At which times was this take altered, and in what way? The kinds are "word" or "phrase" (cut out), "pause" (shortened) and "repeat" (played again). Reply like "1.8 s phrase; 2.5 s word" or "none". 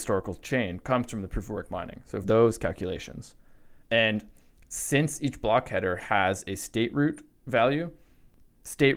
2.2 s word; 3.8 s pause; 7.3 s pause